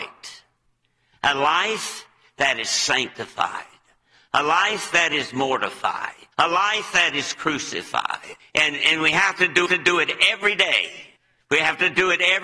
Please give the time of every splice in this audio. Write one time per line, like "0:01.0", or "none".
0:06.3
0:08.4
0:09.7
0:11.2